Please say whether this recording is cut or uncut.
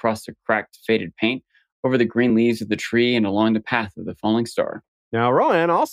uncut